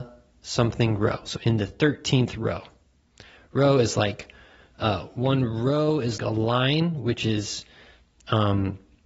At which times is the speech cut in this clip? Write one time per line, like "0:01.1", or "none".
0:06.2